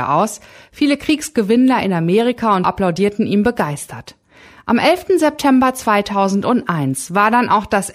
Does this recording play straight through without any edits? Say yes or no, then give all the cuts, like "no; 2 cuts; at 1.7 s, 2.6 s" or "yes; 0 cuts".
no; 1 cut; at 2.6 s